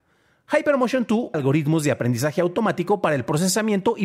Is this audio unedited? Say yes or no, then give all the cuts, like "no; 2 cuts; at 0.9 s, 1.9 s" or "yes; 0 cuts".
no; 1 cut; at 1.3 s